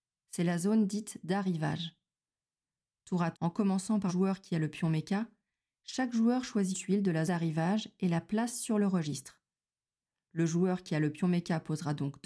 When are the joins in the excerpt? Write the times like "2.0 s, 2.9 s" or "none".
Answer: 3.3 s, 4.1 s, 6.7 s, 7.3 s